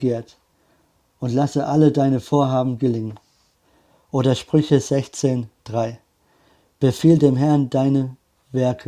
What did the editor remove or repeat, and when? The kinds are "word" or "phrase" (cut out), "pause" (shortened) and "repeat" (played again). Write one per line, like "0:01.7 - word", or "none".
none